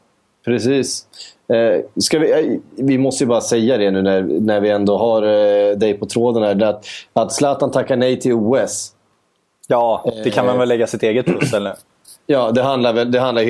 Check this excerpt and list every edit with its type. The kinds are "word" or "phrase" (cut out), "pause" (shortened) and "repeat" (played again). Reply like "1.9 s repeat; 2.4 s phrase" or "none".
none

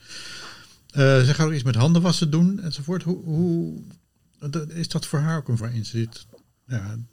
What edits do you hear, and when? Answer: 4.7 s word; 5.6 s word

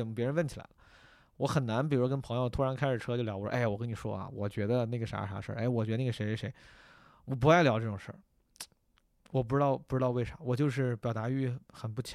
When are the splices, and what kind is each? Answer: none

